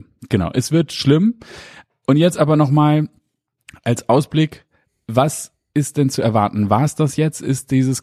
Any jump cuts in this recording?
no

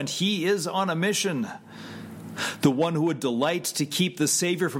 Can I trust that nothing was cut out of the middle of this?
yes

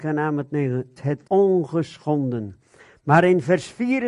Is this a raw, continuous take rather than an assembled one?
no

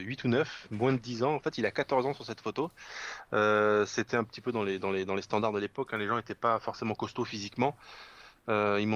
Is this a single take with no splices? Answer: yes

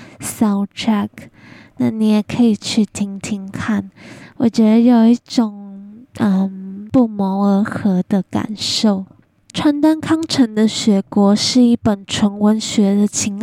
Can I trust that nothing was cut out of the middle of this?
yes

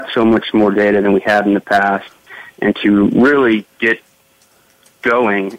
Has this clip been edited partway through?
no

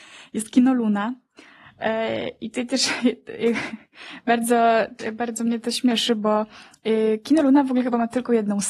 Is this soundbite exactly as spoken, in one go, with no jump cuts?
yes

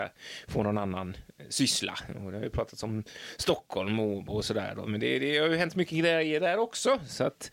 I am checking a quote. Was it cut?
no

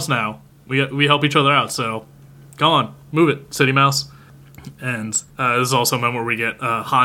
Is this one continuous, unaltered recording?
no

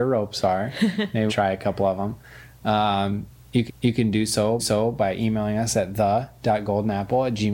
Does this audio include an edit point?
yes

